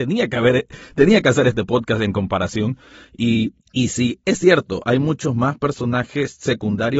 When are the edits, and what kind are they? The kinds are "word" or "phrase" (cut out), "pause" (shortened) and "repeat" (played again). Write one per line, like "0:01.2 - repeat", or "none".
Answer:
0:03.6 - pause